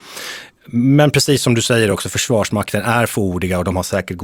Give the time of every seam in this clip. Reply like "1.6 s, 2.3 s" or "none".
none